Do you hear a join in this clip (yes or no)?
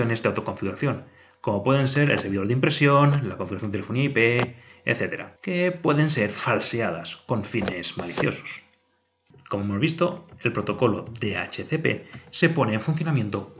yes